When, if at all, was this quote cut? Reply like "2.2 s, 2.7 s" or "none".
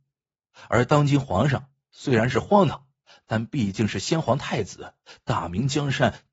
none